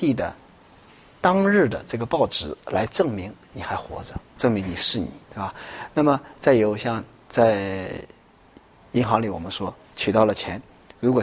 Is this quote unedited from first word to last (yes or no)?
no